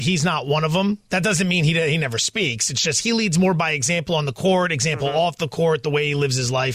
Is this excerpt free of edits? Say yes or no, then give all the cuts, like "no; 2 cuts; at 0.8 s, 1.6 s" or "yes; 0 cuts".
yes; 0 cuts